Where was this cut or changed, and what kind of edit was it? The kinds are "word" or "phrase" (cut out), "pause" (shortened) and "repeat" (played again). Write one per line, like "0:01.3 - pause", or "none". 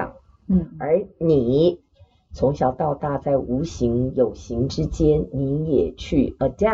none